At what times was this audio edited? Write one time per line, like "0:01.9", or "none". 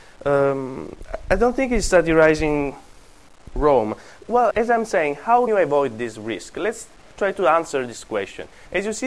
0:04.5
0:05.5
0:07.0